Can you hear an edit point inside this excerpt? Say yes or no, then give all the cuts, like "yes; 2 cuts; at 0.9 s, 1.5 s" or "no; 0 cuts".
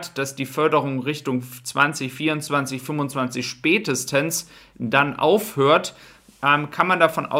no; 0 cuts